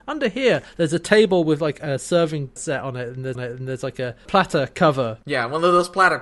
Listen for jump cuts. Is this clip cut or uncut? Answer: cut